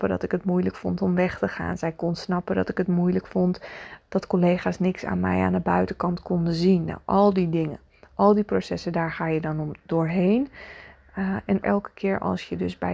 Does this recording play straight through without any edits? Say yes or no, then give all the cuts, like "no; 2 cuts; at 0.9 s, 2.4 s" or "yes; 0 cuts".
no; 1 cut; at 11.6 s